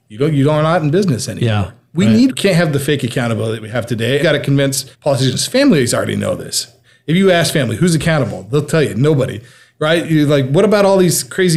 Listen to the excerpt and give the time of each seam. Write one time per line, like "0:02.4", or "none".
0:02.3
0:04.2
0:04.9